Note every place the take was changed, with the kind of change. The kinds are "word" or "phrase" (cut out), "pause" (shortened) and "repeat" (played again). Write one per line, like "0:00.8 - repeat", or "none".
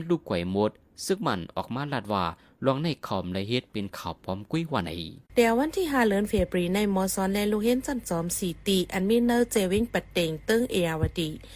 0:05.3 - pause